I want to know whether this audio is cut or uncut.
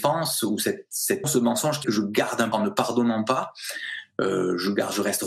cut